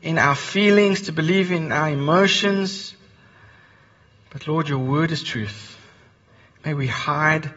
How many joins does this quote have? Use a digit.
0